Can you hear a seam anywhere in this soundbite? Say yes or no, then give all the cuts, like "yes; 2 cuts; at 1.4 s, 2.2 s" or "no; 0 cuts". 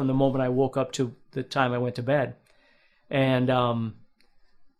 no; 0 cuts